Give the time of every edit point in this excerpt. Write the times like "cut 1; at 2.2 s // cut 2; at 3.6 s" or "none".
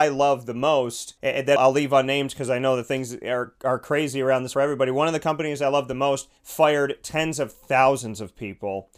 cut 1; at 1.2 s // cut 2; at 1.6 s // cut 3; at 4.5 s // cut 4; at 6.4 s